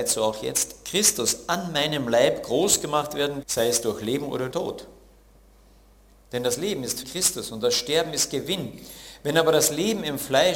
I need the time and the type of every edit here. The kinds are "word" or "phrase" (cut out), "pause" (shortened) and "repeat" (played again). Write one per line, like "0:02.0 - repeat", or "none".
0:03.4 - word
0:04.5 - word
0:07.0 - word

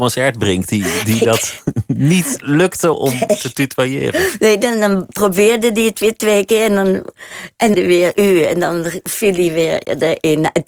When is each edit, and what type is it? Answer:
0:02.9 - word
0:07.7 - phrase

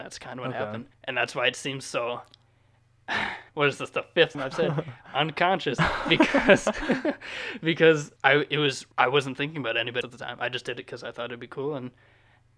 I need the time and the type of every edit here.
0:00.9 - pause
0:03.5 - pause
0:04.3 - word
0:08.2 - pause
0:08.9 - pause
0:10.0 - word

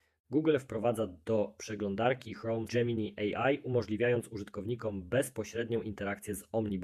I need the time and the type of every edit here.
0:02.7 - word

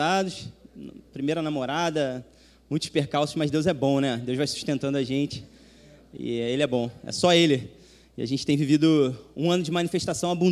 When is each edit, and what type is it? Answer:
none

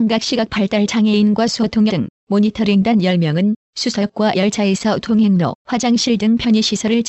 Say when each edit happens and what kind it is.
0:01.9 - word
0:04.3 - word
0:05.6 - word

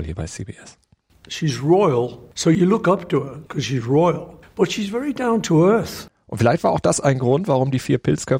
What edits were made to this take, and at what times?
0:03.5 - pause
0:04.4 - pause

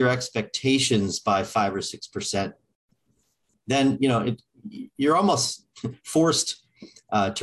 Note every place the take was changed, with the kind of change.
none

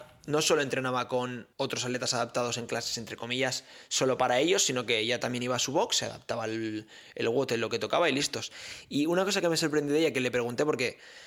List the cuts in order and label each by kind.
0:01.5 - pause

